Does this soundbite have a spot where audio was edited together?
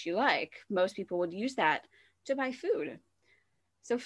no; 0 cuts

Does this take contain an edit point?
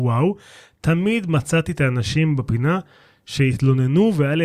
no; 0 cuts

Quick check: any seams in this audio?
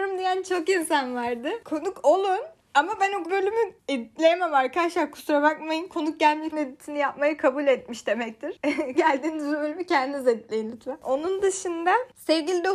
yes; 3 cuts; at 3.2 s, 6.5 s, 8.9 s

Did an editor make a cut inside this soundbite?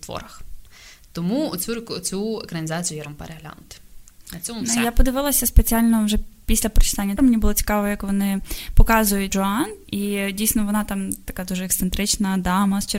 yes; 3 cuts; at 3.0 s, 7.2 s, 9.3 s

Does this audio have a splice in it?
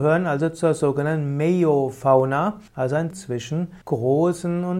yes; 3 cuts; at 2.7 s, 3.1 s, 3.8 s

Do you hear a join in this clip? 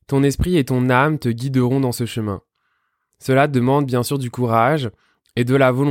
no; 0 cuts

